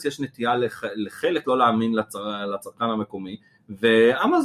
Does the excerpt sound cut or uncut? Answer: cut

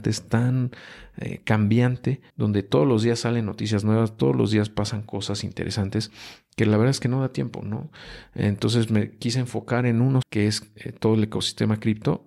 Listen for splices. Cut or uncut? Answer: cut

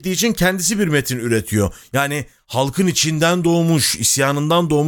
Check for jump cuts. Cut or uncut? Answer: uncut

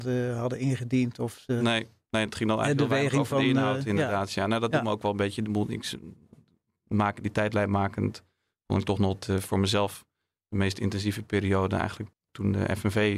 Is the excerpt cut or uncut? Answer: uncut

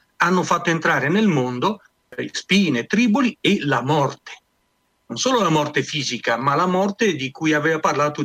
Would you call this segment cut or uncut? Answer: uncut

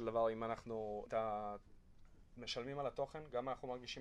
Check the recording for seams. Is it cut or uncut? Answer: cut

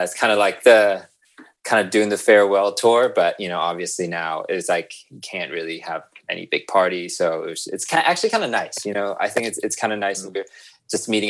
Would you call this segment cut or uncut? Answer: uncut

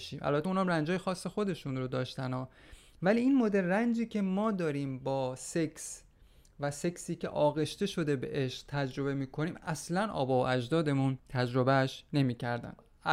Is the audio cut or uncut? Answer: cut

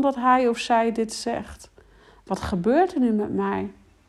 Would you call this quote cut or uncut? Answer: uncut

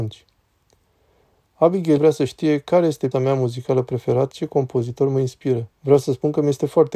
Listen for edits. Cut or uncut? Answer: cut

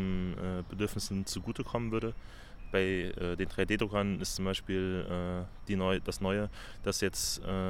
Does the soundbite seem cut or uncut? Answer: uncut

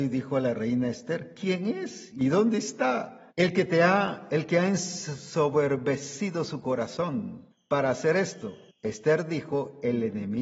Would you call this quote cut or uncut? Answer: cut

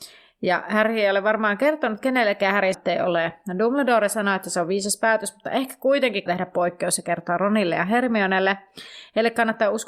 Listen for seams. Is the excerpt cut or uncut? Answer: cut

